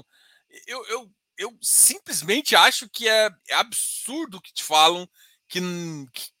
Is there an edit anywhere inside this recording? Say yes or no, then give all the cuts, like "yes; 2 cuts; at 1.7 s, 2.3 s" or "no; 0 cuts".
yes; 1 cut; at 3.4 s